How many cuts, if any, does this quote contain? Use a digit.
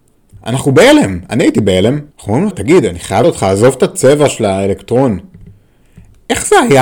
3